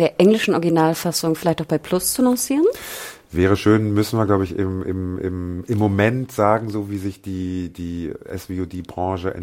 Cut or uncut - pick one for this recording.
uncut